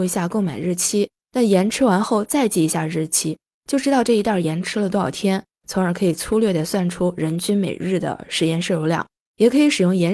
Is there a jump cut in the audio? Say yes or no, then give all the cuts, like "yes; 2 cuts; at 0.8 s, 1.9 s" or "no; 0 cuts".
no; 0 cuts